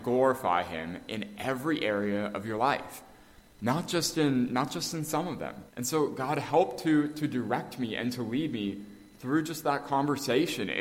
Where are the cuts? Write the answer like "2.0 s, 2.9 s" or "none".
5.7 s